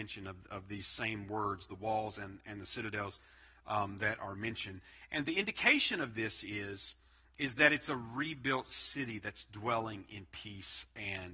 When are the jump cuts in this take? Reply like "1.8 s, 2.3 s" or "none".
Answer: none